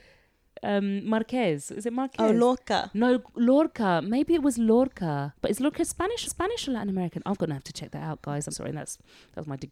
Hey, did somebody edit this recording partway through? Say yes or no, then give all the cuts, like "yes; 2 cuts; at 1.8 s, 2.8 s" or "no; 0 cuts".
yes; 3 cuts; at 5.3 s, 6.2 s, 8.5 s